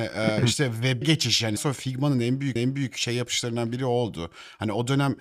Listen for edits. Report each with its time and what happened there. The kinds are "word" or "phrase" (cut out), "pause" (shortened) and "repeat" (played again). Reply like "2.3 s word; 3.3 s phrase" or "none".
1.0 s word; 1.6 s word; 2.6 s repeat